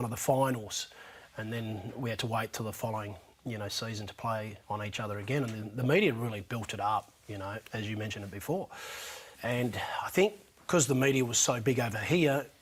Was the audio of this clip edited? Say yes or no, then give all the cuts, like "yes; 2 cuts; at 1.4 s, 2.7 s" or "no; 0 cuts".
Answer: yes; 3 cuts; at 4.6 s, 7.6 s, 9.3 s